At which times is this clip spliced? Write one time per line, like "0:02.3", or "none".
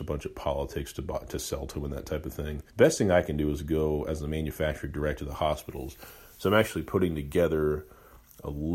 0:02.7